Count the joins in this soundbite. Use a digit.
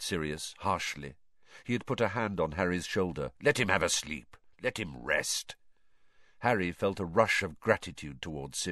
1